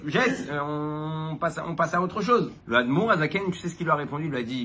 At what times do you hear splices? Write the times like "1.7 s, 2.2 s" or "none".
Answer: 2.6 s

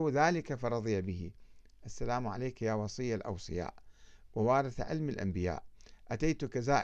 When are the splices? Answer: none

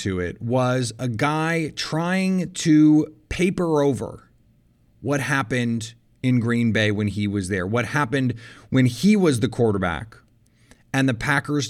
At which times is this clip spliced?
none

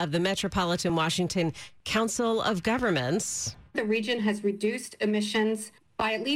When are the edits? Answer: none

